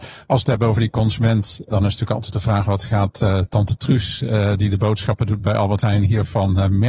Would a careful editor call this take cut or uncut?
uncut